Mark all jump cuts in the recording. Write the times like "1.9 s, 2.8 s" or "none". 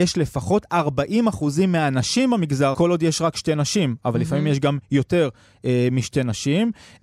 2.7 s